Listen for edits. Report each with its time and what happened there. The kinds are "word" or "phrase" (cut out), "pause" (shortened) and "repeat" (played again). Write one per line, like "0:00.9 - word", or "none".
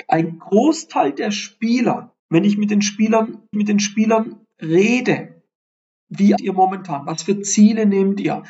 0:02.2 - pause
0:03.5 - repeat
0:06.4 - word